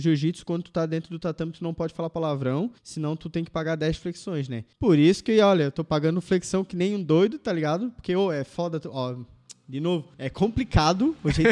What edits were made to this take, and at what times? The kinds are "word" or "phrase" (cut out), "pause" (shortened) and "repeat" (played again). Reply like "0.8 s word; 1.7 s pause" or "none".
2.8 s pause; 4.7 s pause; 10.1 s pause